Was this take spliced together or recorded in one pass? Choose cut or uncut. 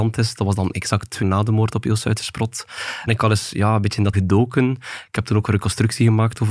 cut